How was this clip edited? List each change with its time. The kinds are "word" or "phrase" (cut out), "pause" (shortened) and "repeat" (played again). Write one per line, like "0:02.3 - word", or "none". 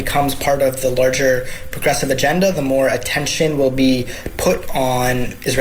none